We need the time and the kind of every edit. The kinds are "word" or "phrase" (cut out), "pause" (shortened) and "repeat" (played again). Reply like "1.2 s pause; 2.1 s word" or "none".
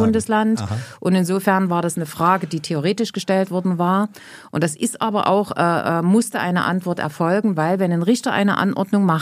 none